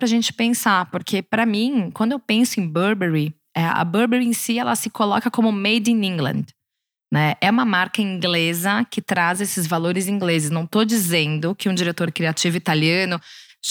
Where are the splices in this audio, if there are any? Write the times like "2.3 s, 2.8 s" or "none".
none